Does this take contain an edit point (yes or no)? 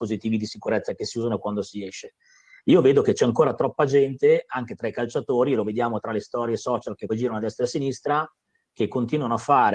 yes